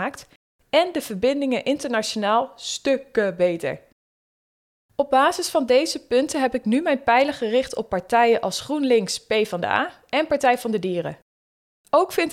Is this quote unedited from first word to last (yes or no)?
yes